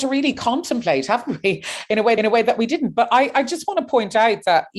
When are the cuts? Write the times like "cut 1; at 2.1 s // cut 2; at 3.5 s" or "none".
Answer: cut 1; at 2.2 s